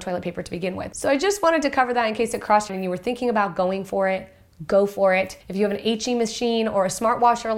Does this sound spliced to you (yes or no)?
yes